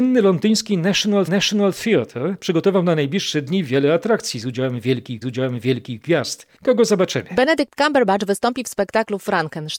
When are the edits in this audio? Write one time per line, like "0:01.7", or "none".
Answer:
0:01.3
0:05.2

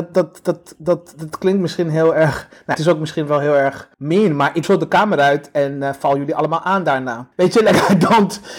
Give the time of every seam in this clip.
0:02.7
0:03.9
0:04.6
0:07.3

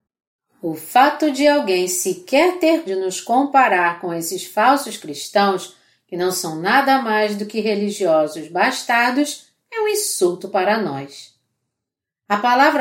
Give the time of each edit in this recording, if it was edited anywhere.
0:02.9

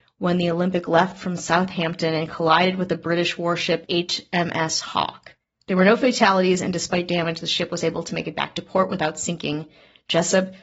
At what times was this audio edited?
none

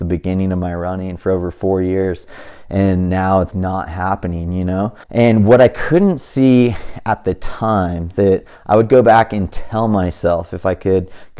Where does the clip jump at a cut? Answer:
0:03.5
0:05.0

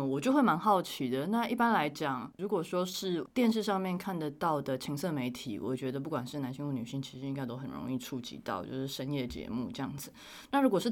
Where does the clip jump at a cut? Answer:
0:02.4

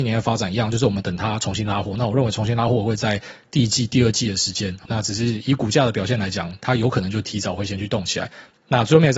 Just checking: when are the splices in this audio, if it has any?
0:04.9

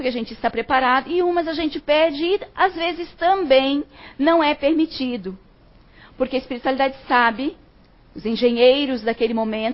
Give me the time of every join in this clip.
none

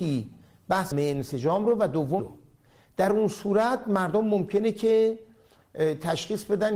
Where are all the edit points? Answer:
0:00.9
0:02.2

